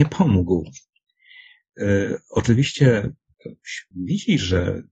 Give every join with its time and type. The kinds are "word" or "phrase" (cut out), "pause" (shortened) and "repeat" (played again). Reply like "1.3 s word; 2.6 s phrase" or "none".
3.3 s word; 3.9 s word